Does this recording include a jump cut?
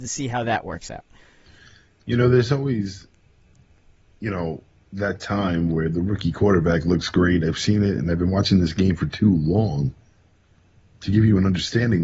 no; 0 cuts

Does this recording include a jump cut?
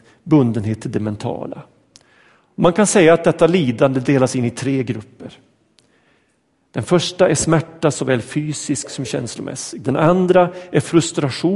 no; 0 cuts

